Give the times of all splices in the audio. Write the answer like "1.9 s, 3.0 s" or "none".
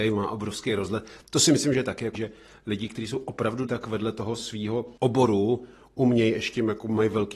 2.2 s, 3.7 s, 5.0 s